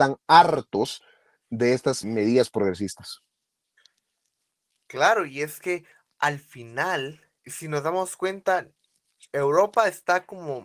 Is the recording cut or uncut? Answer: cut